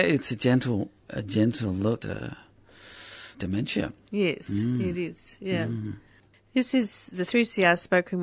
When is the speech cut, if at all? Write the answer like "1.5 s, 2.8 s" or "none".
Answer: 1.0 s, 2.0 s, 3.3 s